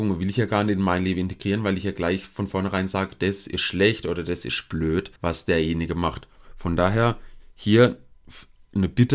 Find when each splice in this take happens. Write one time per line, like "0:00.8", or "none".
0:05.2